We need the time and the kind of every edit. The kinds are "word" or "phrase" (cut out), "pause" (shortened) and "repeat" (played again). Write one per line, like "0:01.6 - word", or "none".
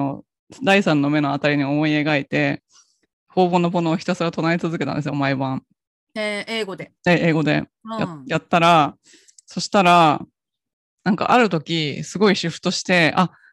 0:07.0 - pause